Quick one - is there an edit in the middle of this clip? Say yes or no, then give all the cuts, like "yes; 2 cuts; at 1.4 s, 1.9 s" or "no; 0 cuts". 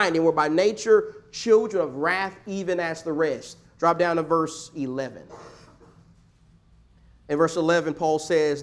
no; 0 cuts